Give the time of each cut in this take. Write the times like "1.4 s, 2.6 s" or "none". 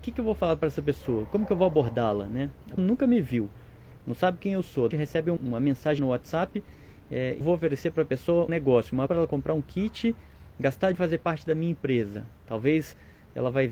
2.8 s, 4.9 s, 5.4 s, 6.0 s, 7.4 s, 8.5 s, 9.1 s, 10.9 s